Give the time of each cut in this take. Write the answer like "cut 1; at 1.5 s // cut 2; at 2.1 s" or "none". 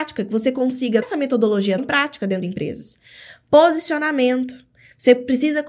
cut 1; at 1.0 s // cut 2; at 1.8 s // cut 3; at 2.4 s